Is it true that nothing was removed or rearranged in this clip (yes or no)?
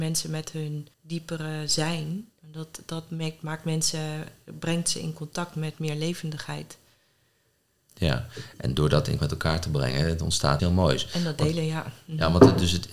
no